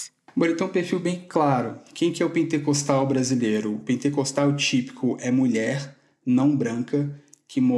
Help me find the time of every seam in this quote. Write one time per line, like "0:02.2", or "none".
none